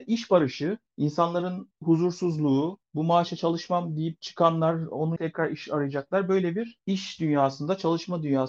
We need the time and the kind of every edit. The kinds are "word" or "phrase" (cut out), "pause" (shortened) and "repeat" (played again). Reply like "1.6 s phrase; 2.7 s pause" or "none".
5.2 s word